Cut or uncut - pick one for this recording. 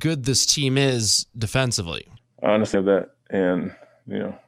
cut